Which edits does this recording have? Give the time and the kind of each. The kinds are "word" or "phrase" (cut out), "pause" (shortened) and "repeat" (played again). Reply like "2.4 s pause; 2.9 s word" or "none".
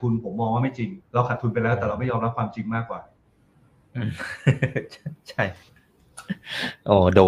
1.0 s pause